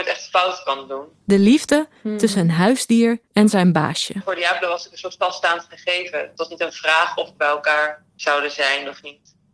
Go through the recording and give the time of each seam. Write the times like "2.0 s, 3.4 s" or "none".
3.2 s, 8.1 s